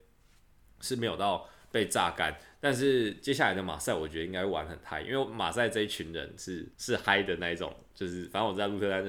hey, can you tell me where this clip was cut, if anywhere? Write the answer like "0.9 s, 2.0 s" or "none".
6.7 s